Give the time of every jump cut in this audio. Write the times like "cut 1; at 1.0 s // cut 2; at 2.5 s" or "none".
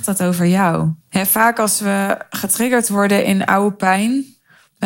cut 1; at 1.0 s